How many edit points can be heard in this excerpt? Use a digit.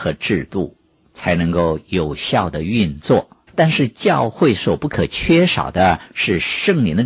1